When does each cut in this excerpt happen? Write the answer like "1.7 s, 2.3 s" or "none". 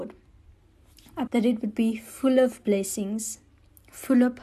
1.3 s